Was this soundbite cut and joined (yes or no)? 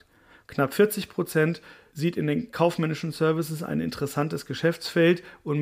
no